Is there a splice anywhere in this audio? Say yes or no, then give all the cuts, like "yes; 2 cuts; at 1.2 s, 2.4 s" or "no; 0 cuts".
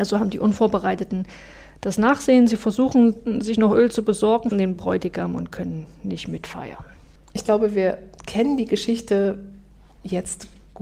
yes; 1 cut; at 4.5 s